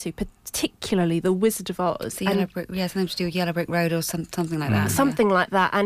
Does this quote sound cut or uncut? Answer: uncut